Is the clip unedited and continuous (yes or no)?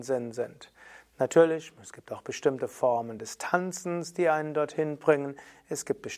yes